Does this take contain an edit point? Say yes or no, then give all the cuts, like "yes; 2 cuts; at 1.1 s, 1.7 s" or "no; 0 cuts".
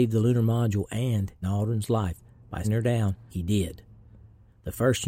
yes; 3 cuts; at 1.4 s, 2.6 s, 3.3 s